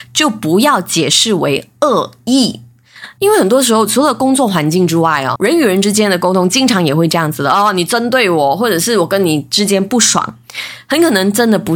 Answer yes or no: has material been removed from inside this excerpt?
yes